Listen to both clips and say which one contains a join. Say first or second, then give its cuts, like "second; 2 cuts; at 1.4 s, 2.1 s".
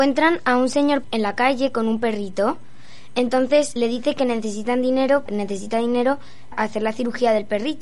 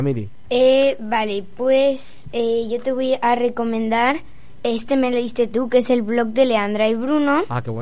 first; 4 cuts; at 1.0 s, 3.8 s, 5.3 s, 6.5 s